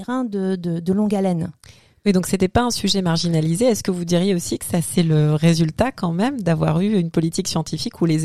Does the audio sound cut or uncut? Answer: uncut